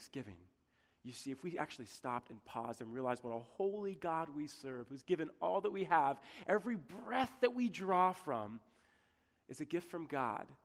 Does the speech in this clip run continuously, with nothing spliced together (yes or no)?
yes